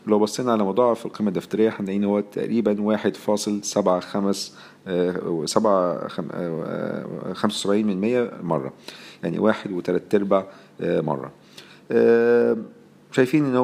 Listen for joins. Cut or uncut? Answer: uncut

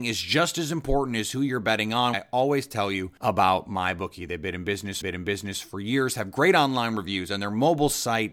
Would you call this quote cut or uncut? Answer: cut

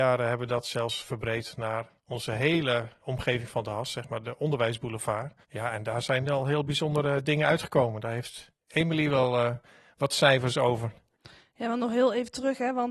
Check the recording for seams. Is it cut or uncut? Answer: cut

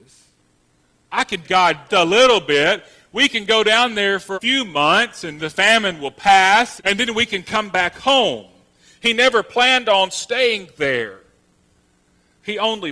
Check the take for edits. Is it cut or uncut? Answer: cut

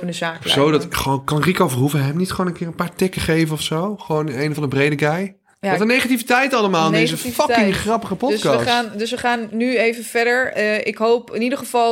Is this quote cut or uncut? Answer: uncut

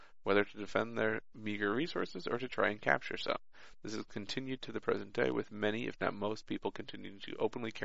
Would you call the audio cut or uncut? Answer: uncut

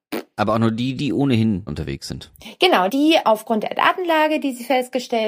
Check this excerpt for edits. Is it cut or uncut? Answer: cut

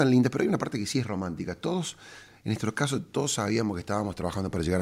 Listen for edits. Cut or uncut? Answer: uncut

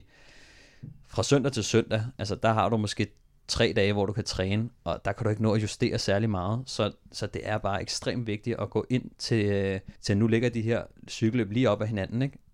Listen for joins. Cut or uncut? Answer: cut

